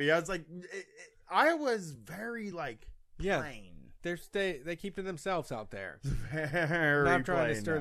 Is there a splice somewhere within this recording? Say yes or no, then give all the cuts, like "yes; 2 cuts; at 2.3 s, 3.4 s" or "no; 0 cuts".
no; 0 cuts